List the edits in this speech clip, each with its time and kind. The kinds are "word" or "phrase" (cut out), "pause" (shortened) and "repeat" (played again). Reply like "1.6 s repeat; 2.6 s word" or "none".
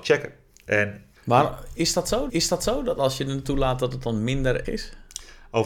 1.2 s word; 2.3 s repeat; 3.4 s word; 4.6 s word